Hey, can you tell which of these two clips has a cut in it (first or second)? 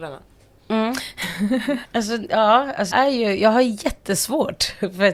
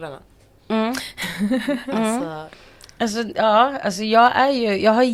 first